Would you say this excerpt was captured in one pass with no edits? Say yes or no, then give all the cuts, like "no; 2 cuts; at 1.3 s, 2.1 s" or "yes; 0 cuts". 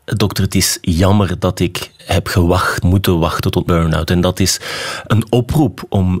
no; 4 cuts; at 2.0 s, 2.8 s, 3.7 s, 5.1 s